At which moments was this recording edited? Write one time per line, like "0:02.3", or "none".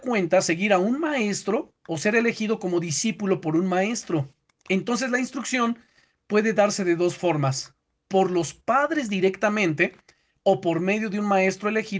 none